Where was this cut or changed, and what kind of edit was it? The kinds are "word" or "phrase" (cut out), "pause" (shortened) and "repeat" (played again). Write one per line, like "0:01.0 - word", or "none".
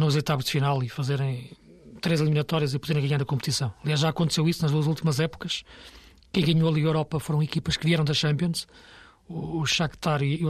none